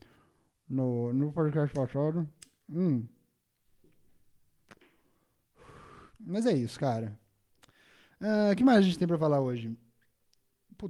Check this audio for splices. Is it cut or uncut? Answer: uncut